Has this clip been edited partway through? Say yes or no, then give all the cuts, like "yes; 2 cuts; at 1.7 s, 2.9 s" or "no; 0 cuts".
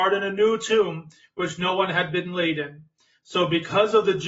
no; 0 cuts